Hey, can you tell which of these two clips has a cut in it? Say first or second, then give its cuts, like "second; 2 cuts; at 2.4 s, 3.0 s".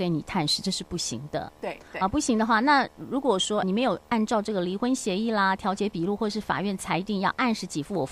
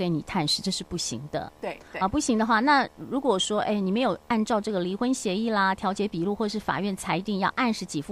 first; 1 cut; at 3.6 s